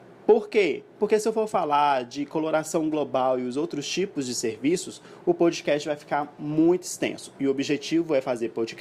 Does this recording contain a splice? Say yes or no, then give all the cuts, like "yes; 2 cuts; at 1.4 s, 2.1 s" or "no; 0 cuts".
no; 0 cuts